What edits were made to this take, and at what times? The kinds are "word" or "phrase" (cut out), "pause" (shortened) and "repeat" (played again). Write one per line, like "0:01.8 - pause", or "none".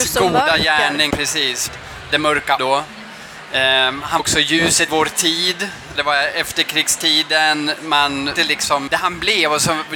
0:01.1 - word
0:01.7 - word
0:02.6 - word
0:04.2 - word
0:04.9 - word
0:06.0 - word
0:08.4 - word
0:08.9 - word